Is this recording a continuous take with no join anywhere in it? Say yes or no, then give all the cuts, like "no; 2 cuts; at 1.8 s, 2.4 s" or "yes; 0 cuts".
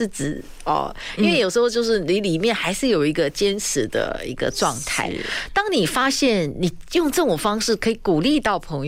yes; 0 cuts